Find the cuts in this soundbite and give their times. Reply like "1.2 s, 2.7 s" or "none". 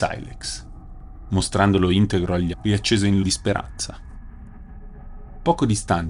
2.5 s, 3.2 s